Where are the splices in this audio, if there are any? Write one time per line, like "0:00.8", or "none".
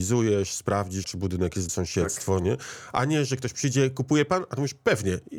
0:01.0
0:01.7